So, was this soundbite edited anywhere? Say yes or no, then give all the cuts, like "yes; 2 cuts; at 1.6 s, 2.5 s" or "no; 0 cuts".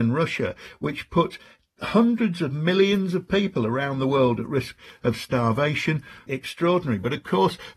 no; 0 cuts